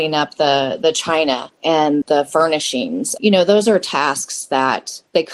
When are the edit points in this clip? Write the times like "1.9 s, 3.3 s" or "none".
2.0 s, 3.2 s